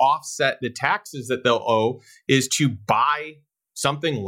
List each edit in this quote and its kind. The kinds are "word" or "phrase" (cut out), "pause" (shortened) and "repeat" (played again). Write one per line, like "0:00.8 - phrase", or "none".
none